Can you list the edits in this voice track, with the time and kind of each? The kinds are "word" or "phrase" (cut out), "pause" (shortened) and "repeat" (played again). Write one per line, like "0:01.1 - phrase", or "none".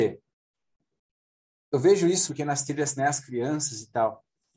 0:02.3 - word
0:03.0 - word